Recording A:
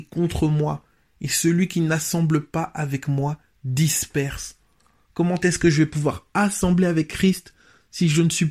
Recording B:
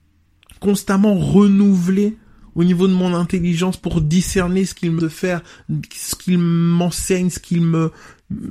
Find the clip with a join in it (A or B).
B